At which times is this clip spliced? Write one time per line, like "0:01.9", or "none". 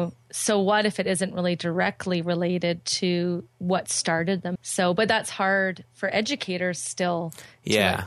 0:03.5
0:04.6